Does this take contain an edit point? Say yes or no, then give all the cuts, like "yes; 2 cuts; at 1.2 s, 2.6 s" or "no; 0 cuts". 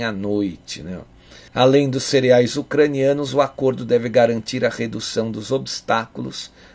yes; 1 cut; at 1.5 s